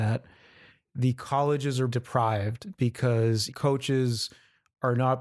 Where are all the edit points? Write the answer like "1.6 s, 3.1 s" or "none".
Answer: 1.9 s, 3.5 s